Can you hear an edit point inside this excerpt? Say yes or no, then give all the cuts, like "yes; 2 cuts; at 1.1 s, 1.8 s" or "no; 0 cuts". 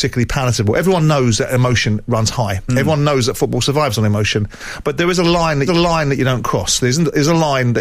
yes; 1 cut; at 5.7 s